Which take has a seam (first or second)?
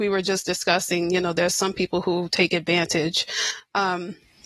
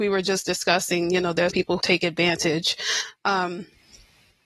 second